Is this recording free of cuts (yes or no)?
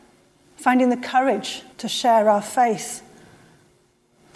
no